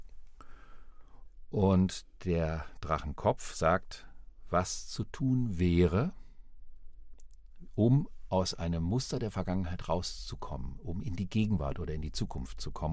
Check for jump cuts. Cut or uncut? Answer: uncut